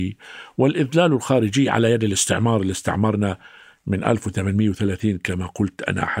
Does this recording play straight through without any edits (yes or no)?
yes